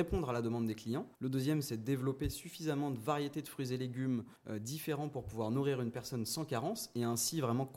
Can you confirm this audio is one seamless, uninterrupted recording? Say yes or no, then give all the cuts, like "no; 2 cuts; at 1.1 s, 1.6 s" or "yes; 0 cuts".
no; 2 cuts; at 1.1 s, 4.4 s